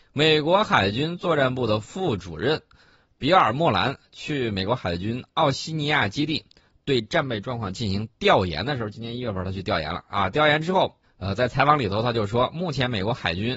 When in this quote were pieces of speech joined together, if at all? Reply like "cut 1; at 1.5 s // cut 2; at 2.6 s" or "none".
cut 1; at 11.0 s